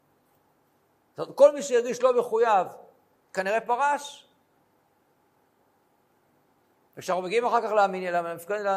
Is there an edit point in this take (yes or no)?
no